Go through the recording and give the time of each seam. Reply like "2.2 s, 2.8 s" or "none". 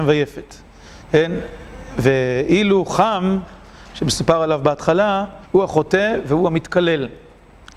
5.5 s